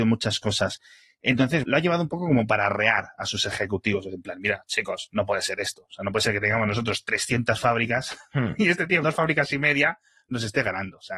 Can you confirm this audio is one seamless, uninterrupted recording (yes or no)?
no